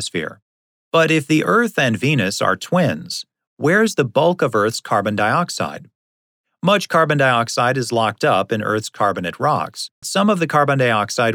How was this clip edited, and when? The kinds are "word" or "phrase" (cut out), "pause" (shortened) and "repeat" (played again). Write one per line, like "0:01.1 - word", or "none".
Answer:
0:10.0 - word